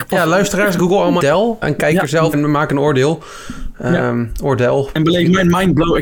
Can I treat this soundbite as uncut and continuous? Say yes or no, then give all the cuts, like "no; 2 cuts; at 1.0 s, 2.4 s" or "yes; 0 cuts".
no; 3 cuts; at 1.2 s, 1.6 s, 2.3 s